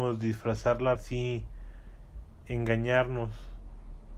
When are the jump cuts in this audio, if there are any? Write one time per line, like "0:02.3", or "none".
0:01.0